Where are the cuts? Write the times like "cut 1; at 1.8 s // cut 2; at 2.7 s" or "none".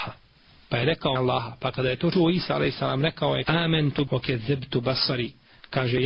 cut 1; at 1.2 s // cut 2; at 2.1 s // cut 3; at 3.4 s // cut 4; at 4.1 s